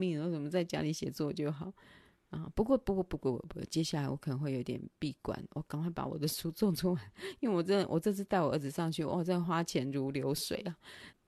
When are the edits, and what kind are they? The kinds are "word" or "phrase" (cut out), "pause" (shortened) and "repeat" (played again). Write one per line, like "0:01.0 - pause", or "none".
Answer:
none